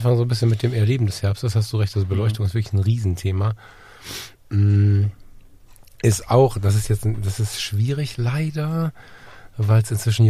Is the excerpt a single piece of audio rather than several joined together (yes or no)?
yes